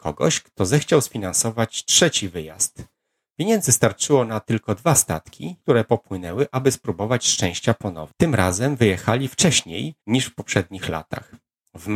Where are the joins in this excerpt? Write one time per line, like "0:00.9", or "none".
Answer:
0:10.0